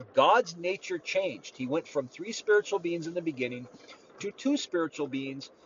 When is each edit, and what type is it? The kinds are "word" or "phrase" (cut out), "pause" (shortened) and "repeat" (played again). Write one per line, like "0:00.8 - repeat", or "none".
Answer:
0:04.3 - word